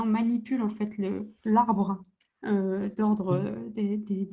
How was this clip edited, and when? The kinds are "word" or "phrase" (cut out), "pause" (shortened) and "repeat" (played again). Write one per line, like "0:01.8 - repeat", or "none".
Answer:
0:01.4 - pause